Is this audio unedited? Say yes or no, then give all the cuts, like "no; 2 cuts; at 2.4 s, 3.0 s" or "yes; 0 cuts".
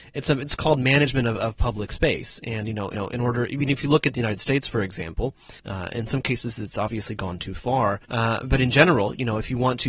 no; 3 cuts; at 2.9 s, 5.6 s, 8.0 s